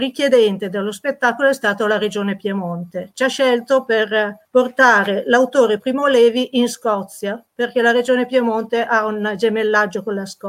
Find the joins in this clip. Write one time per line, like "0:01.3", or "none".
0:04.4